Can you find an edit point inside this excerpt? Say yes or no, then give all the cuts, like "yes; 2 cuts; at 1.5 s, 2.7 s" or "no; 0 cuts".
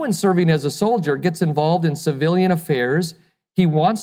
no; 0 cuts